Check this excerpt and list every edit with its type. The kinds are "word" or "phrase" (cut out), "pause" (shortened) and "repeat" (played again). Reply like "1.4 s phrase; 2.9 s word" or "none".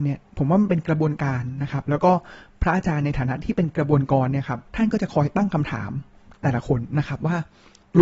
4.7 s pause